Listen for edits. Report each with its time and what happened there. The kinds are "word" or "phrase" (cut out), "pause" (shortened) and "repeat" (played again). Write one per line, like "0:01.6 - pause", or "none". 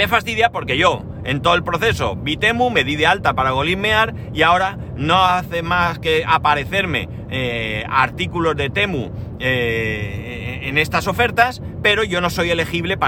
none